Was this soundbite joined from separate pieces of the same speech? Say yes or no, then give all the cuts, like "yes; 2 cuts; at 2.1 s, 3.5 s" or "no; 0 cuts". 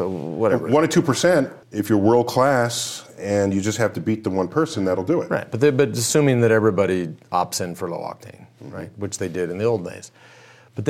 yes; 1 cut; at 1.6 s